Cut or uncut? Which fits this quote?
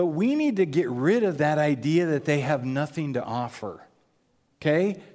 uncut